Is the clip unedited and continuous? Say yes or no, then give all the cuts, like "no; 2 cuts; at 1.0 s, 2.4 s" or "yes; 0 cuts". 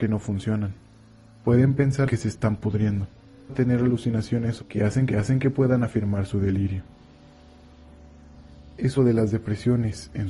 no; 5 cuts; at 2.1 s, 3.5 s, 4.6 s, 5.1 s, 9.0 s